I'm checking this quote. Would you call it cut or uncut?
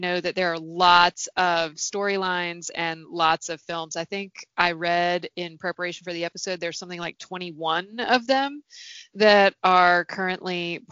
uncut